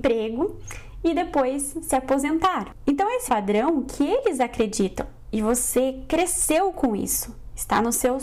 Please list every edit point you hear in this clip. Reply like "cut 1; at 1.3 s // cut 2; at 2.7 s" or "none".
cut 1; at 3.3 s